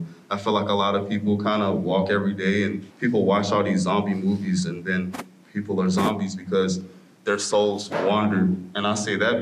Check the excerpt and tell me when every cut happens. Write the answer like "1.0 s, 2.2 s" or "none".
2.9 s